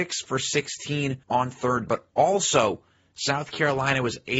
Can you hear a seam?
yes; 2 cuts; at 1.2 s, 1.9 s

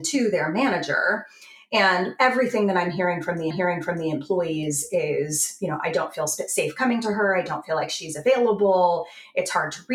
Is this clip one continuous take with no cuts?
no; 1 cut; at 3.5 s

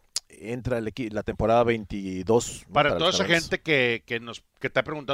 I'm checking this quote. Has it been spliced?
no; 0 cuts

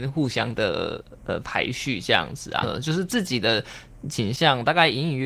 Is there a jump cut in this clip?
yes; 1 cut; at 2.6 s

